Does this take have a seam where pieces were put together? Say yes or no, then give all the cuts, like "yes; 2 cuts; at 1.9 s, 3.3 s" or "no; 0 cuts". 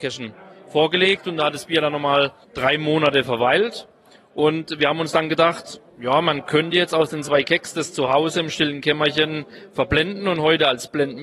yes; 2 cuts; at 2.4 s, 5.9 s